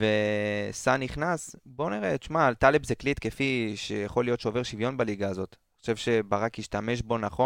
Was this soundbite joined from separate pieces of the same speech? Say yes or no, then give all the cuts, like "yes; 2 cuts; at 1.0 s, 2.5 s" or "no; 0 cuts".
no; 0 cuts